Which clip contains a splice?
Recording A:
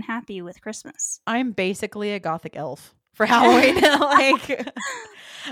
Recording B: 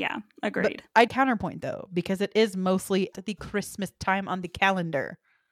B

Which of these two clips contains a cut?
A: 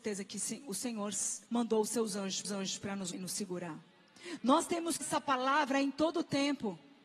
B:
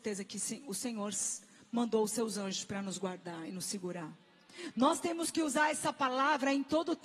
A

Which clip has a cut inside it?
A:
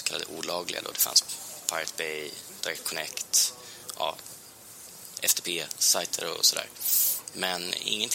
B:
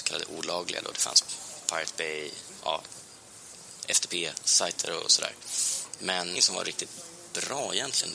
B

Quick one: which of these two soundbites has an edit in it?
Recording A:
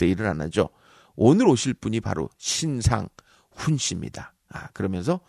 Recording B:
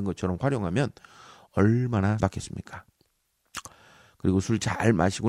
B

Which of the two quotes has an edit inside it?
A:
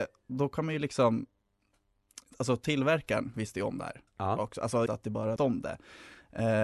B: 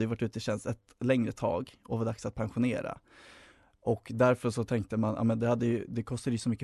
A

